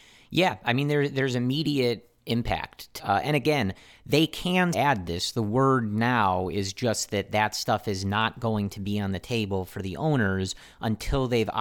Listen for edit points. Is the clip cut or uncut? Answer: cut